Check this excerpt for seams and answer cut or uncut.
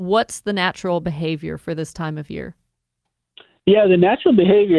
uncut